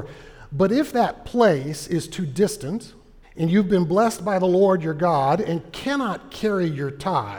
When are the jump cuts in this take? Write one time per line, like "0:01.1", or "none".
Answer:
0:03.2

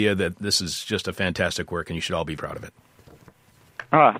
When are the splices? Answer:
0:02.4

